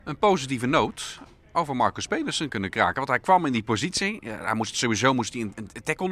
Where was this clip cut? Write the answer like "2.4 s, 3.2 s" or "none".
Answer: 2.5 s, 4.7 s